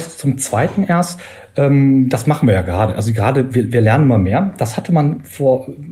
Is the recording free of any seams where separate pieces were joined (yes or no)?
yes